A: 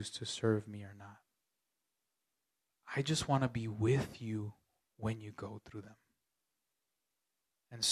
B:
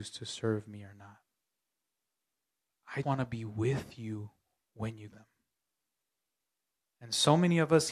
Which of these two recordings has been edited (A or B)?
B